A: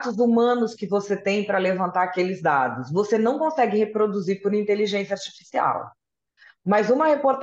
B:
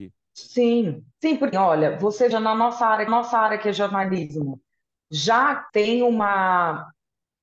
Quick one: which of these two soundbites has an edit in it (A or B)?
B